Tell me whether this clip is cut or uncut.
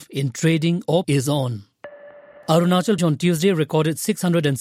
cut